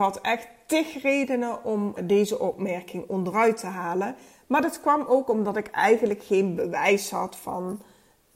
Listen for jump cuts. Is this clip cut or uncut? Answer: cut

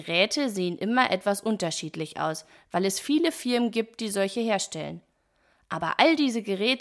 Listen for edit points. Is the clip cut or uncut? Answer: uncut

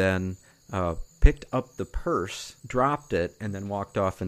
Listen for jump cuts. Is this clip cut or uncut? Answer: cut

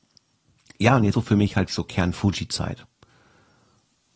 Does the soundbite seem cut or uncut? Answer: cut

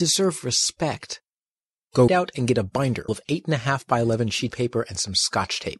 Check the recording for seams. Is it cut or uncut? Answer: cut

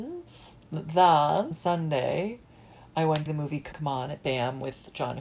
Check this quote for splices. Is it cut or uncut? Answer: cut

